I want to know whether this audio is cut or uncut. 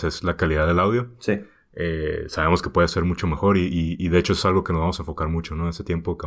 uncut